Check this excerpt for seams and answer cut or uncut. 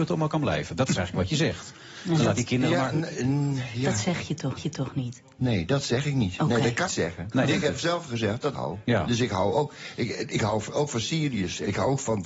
cut